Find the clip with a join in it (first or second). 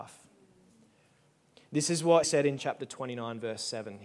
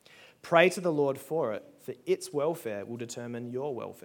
first